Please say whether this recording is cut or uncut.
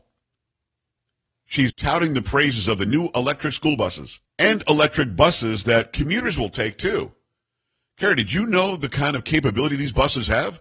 cut